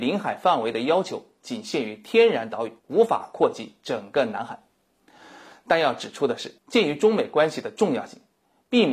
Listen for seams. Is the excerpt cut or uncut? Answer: cut